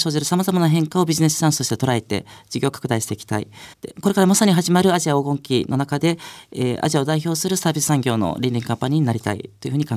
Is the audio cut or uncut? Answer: cut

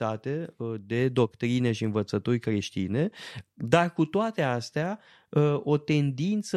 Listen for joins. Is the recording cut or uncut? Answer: uncut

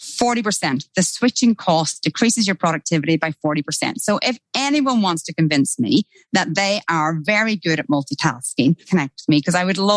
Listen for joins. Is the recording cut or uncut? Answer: cut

